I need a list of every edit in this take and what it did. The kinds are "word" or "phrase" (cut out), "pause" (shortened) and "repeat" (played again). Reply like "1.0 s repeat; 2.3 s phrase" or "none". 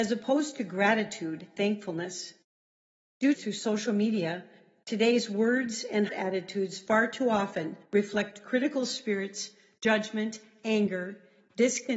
1.6 s word; 3.3 s phrase; 6.1 s word; 7.9 s pause